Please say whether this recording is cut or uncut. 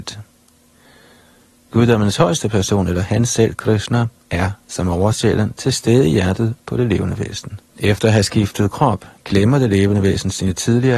cut